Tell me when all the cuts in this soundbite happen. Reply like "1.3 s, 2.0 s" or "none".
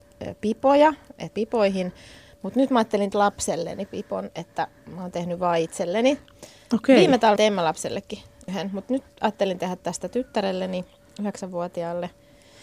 1.3 s, 3.1 s, 7.4 s